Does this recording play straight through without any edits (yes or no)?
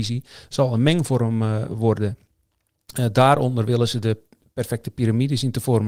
yes